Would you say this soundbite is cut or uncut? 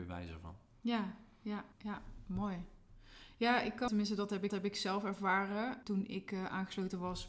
cut